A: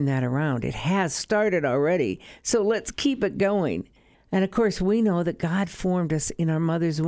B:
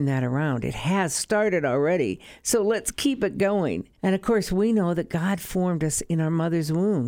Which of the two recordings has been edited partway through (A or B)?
B